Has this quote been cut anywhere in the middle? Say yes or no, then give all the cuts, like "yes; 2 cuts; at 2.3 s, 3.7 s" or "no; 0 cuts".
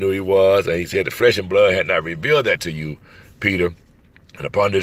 no; 0 cuts